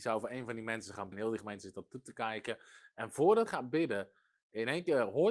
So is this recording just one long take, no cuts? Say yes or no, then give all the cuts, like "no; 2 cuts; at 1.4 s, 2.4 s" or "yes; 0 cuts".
no; 2 cuts; at 1.1 s, 3.5 s